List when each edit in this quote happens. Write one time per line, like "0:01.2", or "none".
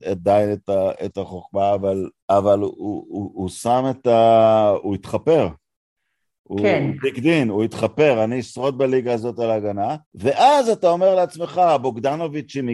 0:02.2
0:10.0